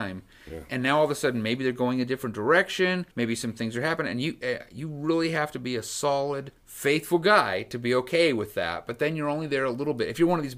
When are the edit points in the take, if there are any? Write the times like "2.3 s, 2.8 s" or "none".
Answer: 3.1 s, 6.6 s